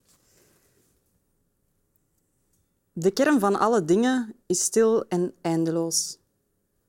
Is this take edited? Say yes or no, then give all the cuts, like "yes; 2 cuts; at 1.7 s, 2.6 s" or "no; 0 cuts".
yes; 1 cut; at 4.4 s